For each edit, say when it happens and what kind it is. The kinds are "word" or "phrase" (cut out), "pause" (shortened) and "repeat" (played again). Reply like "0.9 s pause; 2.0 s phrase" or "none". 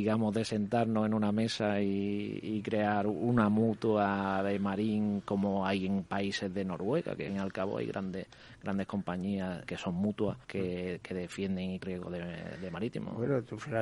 7.3 s phrase; 9.7 s word; 10.4 s pause; 11.8 s phrase